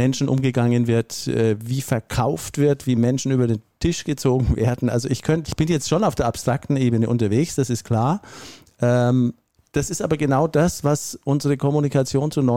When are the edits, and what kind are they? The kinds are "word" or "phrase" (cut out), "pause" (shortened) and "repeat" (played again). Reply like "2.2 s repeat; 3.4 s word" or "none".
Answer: 5.4 s word